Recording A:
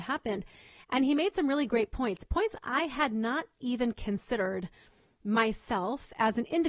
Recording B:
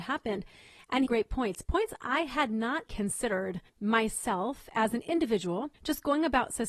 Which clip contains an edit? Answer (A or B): B